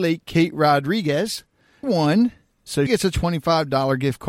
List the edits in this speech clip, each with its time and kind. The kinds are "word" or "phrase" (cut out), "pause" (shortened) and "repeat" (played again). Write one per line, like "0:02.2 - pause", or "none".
0:01.8 - phrase
0:02.9 - word